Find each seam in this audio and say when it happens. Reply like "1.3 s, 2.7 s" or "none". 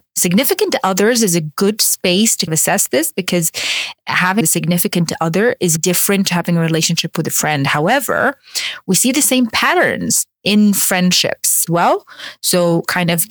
2.5 s, 4.4 s, 5.8 s, 11.7 s